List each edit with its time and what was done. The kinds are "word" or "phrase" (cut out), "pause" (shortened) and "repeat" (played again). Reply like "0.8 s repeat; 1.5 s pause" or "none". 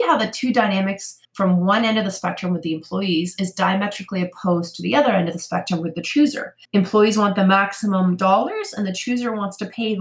1.2 s pause; 6.6 s pause